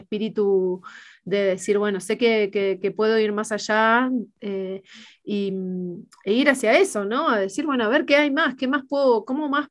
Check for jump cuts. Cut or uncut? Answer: uncut